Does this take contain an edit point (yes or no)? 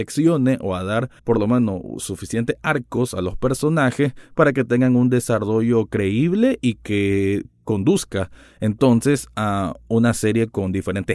yes